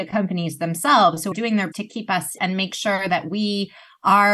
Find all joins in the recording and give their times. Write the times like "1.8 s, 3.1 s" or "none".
1.3 s, 1.7 s, 2.4 s